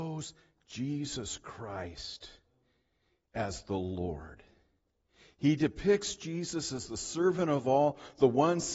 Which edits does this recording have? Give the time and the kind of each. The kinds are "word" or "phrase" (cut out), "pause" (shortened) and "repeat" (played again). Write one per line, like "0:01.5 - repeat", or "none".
none